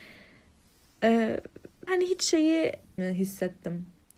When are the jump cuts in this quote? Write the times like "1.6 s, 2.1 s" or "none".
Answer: 1.9 s, 3.0 s